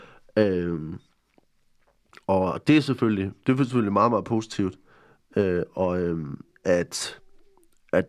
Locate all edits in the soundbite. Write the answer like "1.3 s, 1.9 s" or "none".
none